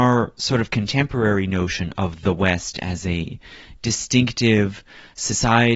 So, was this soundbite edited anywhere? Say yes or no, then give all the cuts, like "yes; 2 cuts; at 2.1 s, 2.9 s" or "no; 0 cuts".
no; 0 cuts